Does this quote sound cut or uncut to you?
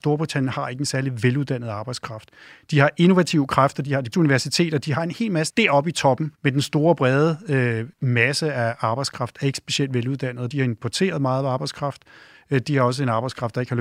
cut